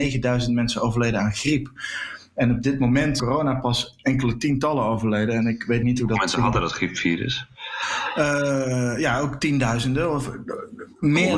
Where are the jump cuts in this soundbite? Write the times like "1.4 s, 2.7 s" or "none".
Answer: 3.2 s, 5.8 s